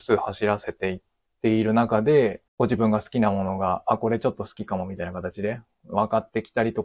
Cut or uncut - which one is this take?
cut